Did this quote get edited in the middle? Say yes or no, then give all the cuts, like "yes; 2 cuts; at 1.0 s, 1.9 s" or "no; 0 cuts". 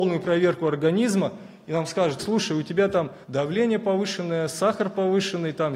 yes; 2 cuts; at 2.2 s, 3.2 s